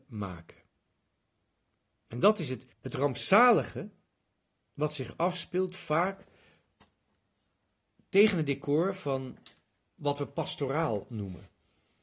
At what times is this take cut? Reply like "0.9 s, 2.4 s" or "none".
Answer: 2.7 s

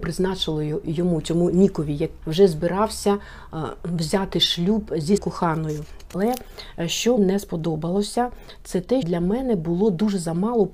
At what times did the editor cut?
2.2 s, 5.2 s, 7.2 s, 9.0 s

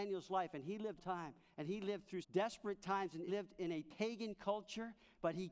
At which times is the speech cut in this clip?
1.0 s, 2.2 s, 3.3 s

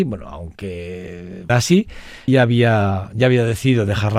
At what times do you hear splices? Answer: 1.5 s, 2.3 s

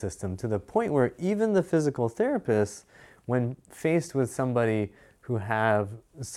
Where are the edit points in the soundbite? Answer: none

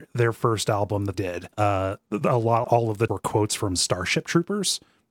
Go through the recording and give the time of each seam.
1.1 s, 1.5 s, 2.6 s, 3.1 s

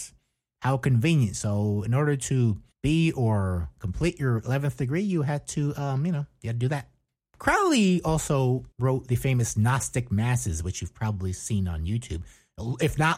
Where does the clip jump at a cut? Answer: 2.7 s, 8.7 s

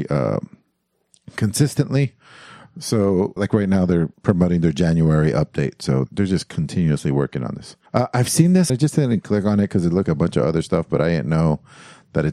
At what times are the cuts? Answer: 3.4 s, 4.1 s, 6.1 s, 7.9 s, 8.7 s, 10.0 s

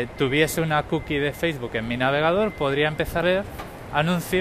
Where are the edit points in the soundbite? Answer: 3.2 s

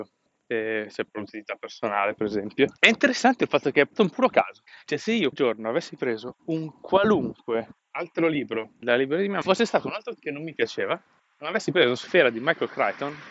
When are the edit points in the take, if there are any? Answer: 1.1 s, 2.8 s, 4.0 s, 5.3 s, 6.4 s, 7.8 s, 8.8 s, 9.4 s, 10.2 s

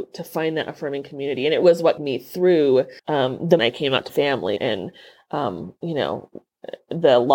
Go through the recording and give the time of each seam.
1.6 s, 2.0 s, 3.0 s, 3.6 s, 4.1 s, 4.6 s

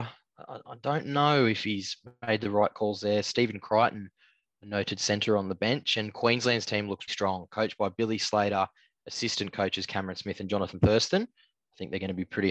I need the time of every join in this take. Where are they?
7.1 s

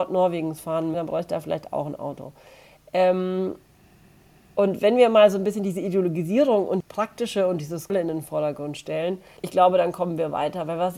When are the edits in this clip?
0.9 s, 6.8 s, 7.9 s, 9.4 s

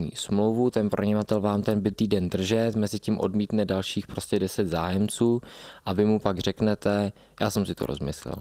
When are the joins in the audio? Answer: 1.9 s

